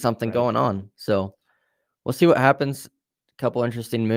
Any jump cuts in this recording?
no; 0 cuts

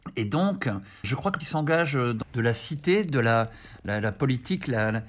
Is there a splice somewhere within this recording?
yes; 3 cuts; at 1.0 s, 1.4 s, 2.2 s

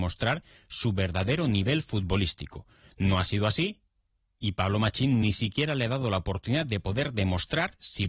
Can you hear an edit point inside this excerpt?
no; 0 cuts

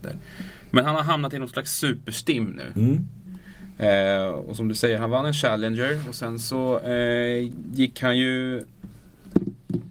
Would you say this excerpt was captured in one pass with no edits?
yes; 0 cuts

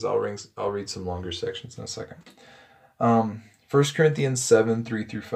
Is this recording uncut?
yes; 0 cuts

